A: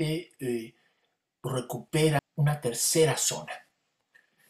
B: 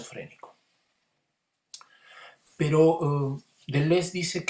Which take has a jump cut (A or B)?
A